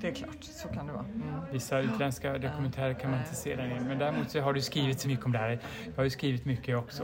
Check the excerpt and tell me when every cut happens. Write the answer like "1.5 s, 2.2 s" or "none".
5.0 s

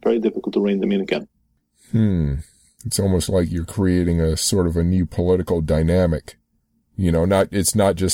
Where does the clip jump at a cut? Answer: none

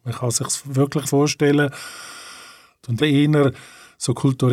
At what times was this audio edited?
1.0 s, 3.0 s

